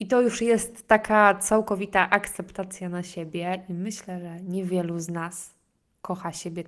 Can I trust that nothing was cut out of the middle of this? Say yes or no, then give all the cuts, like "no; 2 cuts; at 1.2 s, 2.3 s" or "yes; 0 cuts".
yes; 0 cuts